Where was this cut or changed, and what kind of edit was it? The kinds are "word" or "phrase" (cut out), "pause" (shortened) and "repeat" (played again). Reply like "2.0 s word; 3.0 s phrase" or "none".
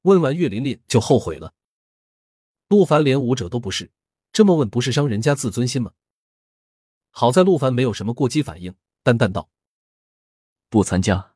none